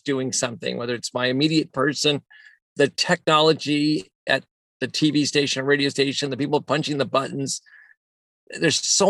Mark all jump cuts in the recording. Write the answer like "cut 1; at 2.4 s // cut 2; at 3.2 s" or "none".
cut 1; at 1.7 s